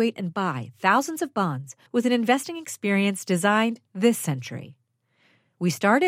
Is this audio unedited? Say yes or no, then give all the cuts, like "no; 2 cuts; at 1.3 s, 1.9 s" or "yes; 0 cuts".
no; 1 cut; at 1.9 s